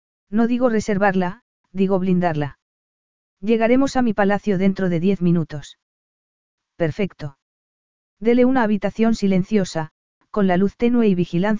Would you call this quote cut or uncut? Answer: uncut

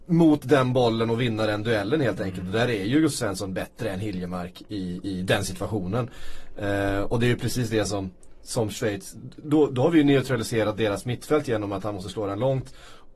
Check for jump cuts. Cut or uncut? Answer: uncut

